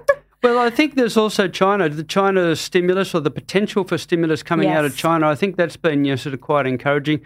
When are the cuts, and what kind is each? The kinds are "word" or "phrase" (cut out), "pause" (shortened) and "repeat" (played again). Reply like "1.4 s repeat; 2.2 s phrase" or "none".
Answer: none